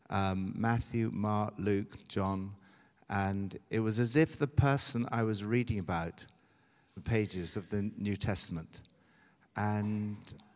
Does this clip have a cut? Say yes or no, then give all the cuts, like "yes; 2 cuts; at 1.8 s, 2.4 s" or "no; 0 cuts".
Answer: yes; 2 cuts; at 2.0 s, 7.0 s